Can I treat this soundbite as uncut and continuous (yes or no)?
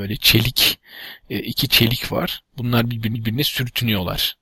no